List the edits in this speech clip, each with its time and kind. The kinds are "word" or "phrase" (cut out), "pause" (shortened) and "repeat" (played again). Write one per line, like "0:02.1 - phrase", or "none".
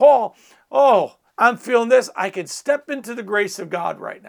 0:01.3 - pause